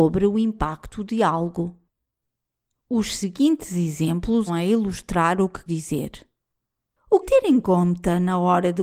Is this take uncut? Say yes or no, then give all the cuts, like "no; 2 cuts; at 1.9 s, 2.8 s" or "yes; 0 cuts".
no; 3 cuts; at 4.5 s, 5.7 s, 7.2 s